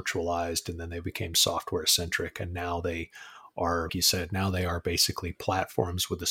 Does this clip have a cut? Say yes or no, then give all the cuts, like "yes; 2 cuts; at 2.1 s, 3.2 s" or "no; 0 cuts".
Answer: yes; 1 cut; at 3.9 s